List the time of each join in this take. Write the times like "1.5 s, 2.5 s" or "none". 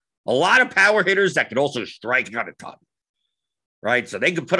none